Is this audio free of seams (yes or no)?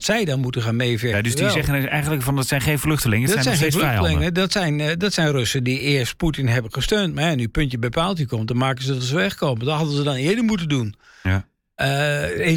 yes